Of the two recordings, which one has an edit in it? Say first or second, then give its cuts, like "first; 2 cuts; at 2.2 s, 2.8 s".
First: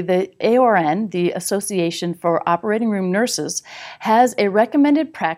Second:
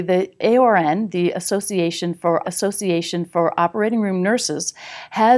second; 1 cut; at 2.4 s